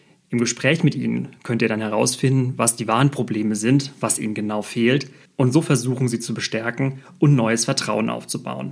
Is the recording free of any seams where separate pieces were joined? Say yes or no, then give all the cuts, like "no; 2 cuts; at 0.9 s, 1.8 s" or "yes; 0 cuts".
yes; 0 cuts